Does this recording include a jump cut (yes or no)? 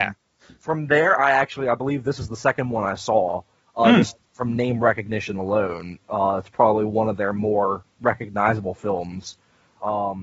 no